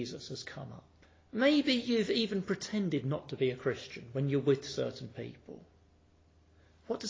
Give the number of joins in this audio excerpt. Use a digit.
1